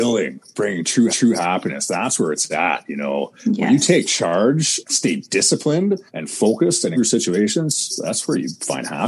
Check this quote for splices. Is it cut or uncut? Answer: cut